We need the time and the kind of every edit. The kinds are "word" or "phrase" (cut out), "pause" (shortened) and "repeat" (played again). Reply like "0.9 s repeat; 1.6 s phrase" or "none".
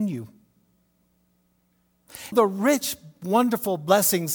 2.3 s phrase